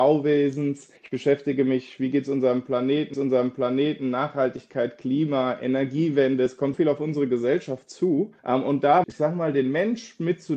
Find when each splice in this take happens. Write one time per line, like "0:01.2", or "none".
0:01.0
0:03.1
0:06.7
0:08.4
0:09.0